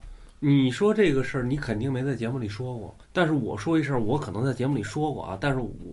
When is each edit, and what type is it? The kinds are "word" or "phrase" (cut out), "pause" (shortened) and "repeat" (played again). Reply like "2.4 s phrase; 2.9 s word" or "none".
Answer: 3.0 s pause